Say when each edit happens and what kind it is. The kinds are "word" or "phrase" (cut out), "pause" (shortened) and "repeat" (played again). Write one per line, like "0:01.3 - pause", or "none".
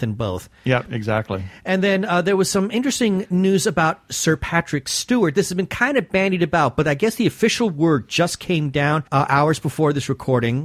0:09.1 - pause